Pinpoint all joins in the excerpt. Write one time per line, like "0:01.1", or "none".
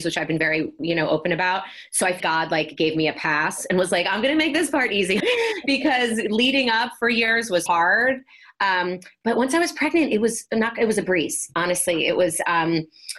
0:02.2
0:05.2
0:07.7